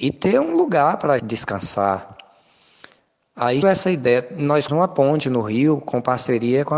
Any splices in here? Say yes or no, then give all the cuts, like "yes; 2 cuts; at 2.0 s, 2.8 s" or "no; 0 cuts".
yes; 3 cuts; at 1.2 s, 3.6 s, 4.7 s